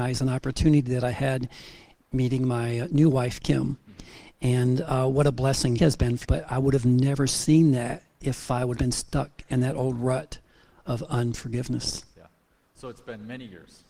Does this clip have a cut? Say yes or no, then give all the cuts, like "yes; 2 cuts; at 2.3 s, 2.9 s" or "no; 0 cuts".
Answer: yes; 3 cuts; at 5.8 s, 6.2 s, 8.8 s